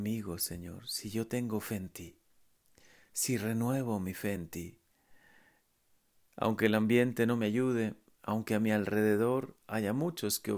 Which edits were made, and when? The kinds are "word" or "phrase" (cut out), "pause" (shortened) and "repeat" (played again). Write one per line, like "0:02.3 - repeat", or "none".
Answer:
none